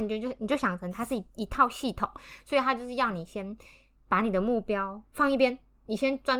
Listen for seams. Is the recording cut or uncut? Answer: uncut